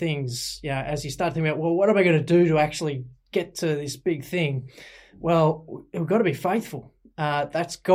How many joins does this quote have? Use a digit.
0